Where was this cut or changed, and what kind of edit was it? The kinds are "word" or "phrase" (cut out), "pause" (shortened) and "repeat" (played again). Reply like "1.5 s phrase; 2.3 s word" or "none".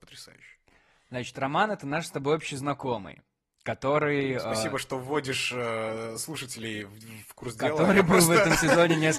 none